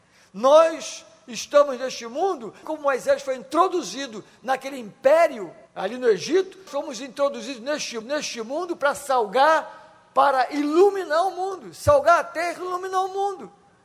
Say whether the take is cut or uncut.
cut